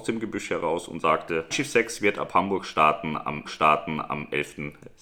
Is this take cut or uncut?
cut